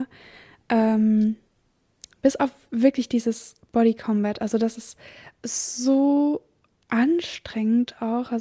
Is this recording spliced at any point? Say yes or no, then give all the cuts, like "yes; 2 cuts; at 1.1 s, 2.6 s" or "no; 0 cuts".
no; 0 cuts